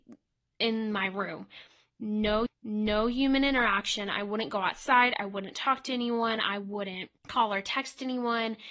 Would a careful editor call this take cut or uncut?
cut